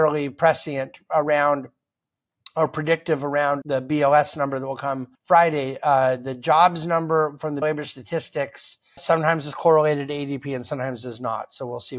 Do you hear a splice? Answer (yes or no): yes